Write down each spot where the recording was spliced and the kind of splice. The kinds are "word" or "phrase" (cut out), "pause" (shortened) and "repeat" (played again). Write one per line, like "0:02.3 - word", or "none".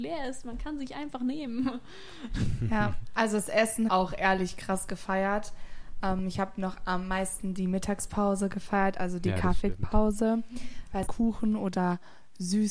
0:03.9 - phrase
0:11.1 - phrase